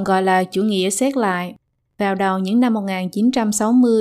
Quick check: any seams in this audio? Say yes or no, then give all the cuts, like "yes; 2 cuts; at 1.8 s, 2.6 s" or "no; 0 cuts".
no; 0 cuts